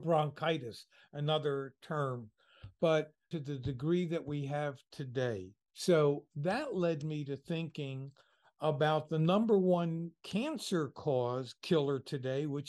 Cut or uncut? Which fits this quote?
cut